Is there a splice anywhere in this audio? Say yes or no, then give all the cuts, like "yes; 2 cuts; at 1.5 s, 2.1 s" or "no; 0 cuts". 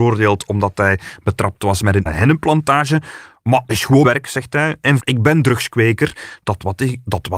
yes; 4 cuts; at 2.1 s, 3.7 s, 4.0 s, 5.0 s